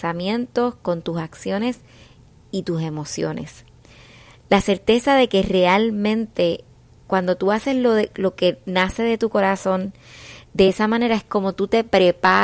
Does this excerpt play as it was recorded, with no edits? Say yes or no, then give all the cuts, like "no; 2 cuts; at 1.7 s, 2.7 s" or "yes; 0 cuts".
yes; 0 cuts